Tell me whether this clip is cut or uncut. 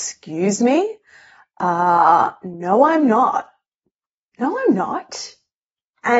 uncut